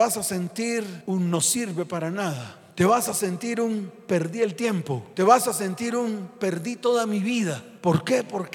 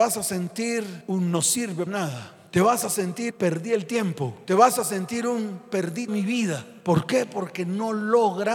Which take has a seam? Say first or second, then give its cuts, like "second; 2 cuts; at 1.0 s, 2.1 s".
second; 3 cuts; at 1.9 s, 3.3 s, 6.1 s